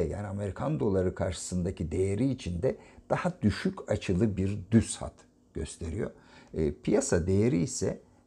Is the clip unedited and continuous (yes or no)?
yes